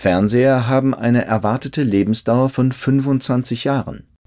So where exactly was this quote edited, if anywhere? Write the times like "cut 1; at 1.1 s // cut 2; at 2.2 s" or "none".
none